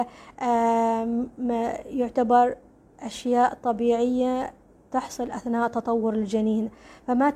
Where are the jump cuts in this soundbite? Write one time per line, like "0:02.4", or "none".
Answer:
none